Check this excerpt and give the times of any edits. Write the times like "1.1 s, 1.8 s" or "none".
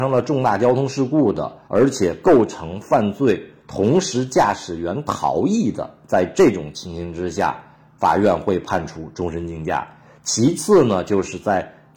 1.7 s

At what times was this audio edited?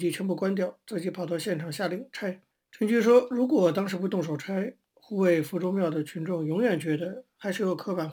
2.5 s

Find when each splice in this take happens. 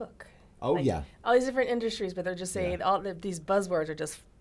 none

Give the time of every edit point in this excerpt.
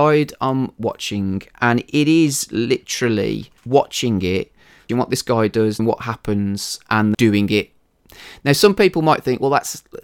3.6 s, 4.9 s, 5.8 s, 7.1 s

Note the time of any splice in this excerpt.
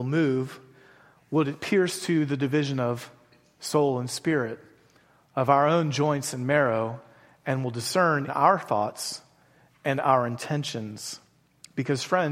8.3 s

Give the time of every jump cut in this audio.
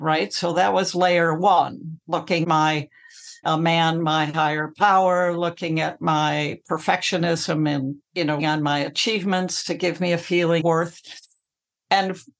2.4 s, 3.4 s, 8.0 s, 8.4 s, 10.6 s

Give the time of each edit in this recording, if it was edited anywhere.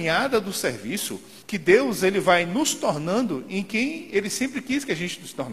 1.4 s

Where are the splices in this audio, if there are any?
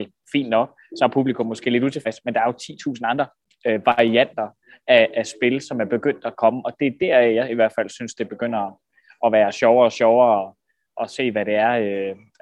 none

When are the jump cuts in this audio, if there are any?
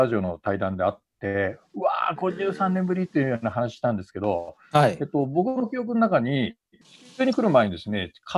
none

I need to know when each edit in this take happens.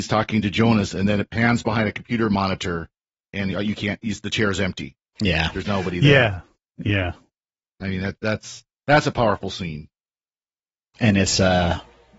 none

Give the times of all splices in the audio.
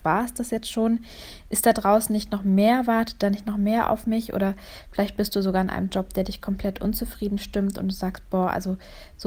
none

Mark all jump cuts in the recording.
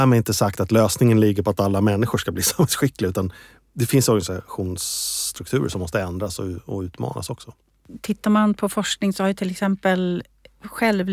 none

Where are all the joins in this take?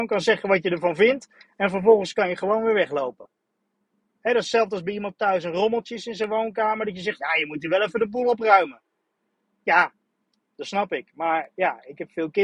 none

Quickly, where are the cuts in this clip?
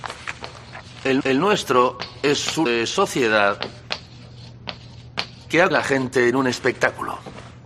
1.2 s, 2.7 s, 5.7 s

